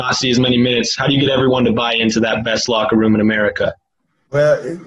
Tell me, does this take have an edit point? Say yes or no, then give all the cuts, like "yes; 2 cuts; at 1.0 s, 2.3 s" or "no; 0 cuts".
no; 0 cuts